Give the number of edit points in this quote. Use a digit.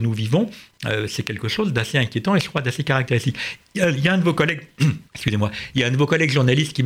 1